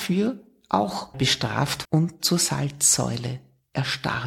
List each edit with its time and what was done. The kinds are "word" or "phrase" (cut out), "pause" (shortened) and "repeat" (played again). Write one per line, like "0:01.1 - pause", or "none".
0:01.1 - word
0:01.8 - word

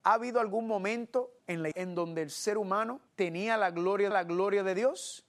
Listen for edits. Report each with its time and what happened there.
0:01.4 - pause
0:01.7 - phrase
0:03.1 - pause
0:04.1 - repeat

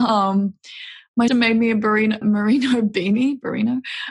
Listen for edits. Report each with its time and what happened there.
0:01.3 - word
0:02.2 - word

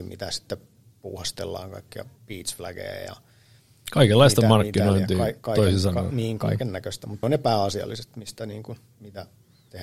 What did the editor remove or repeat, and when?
0:02.2 - pause
0:03.6 - pause
0:07.2 - word

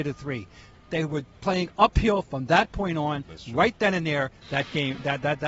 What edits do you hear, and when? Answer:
none

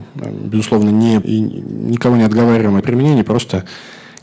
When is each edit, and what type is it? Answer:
0:01.2 - word
0:02.8 - word

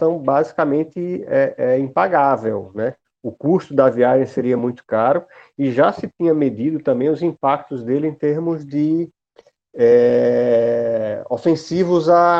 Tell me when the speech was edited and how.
none

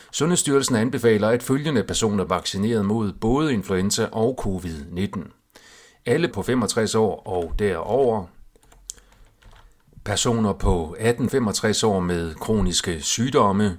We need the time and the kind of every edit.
0:02.3 - word
0:06.3 - word
0:11.3 - word

